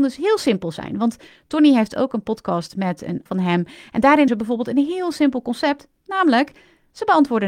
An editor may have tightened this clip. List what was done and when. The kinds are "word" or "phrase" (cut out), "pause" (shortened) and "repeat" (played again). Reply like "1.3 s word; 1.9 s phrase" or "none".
3.3 s phrase; 4.3 s word